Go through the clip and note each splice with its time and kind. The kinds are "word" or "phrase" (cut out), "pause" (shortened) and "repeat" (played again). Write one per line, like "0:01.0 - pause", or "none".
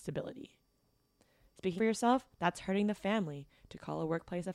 0:01.8 - word